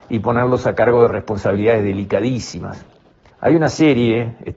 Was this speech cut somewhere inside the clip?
no; 0 cuts

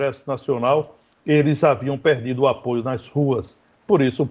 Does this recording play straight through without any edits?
yes; 0 cuts

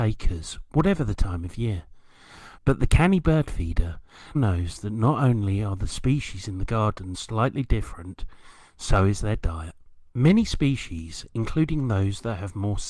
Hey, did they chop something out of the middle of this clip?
yes; 3 cuts; at 4.3 s, 7.1 s, 10.1 s

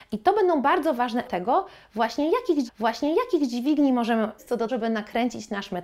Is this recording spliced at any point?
yes; 4 cuts; at 1.2 s, 2.7 s, 4.4 s, 4.7 s

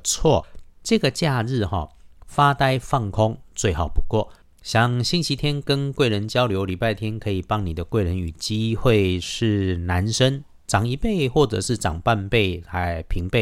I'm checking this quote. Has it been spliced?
no; 0 cuts

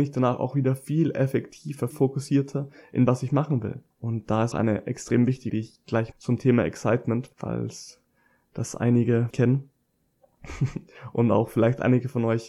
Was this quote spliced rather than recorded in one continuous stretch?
yes; 8 cuts; at 1.9 s, 3.1 s, 3.9 s, 4.5 s, 5.5 s, 6.1 s, 7.3 s, 9.3 s

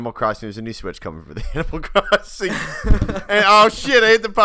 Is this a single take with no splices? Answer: yes; 0 cuts

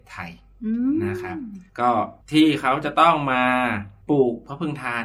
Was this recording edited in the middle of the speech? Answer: yes; 2 cuts; at 1.7 s, 2.2 s

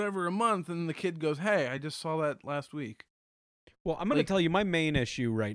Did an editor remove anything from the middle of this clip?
no; 0 cuts

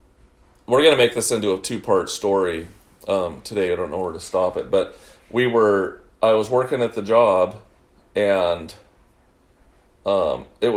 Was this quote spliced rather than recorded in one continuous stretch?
no; 0 cuts

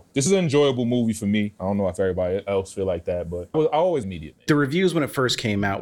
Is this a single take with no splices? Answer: no; 1 cut; at 4.0 s

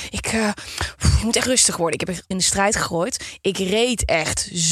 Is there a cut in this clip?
yes; 2 cuts; at 1.4 s, 2.3 s

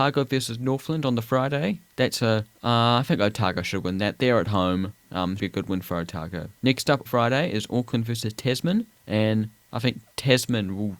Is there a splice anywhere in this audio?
yes; 6 cuts; at 1.9 s, 2.5 s, 5.4 s, 6.6 s, 7.1 s, 8.9 s

